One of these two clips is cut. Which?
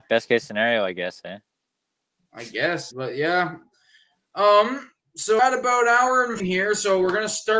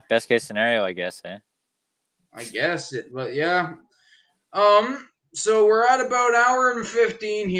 first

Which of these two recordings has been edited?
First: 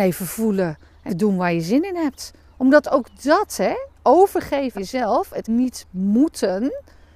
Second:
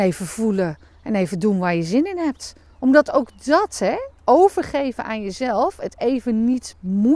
first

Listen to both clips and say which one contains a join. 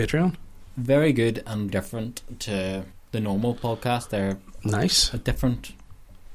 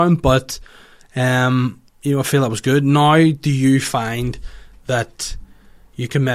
first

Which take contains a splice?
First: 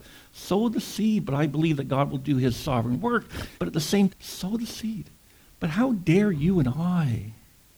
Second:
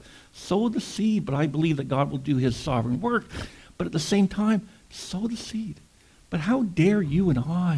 first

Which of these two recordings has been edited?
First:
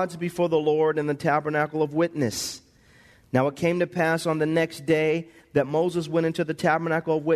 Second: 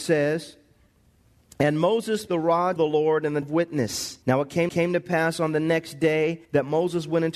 second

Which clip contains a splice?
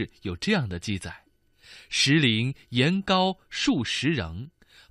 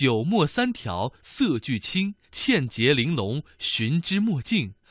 second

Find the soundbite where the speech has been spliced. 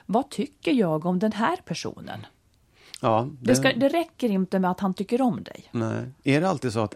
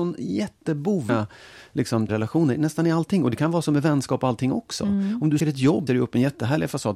second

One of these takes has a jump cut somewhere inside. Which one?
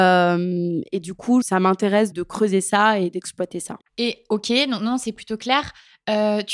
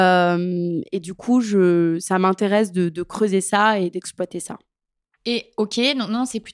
first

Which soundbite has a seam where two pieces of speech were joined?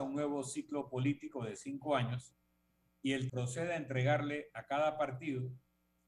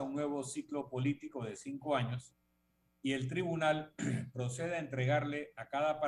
first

